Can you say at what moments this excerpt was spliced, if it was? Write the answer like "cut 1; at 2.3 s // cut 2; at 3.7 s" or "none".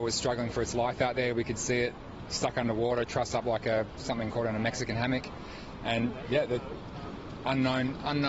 cut 1; at 2.2 s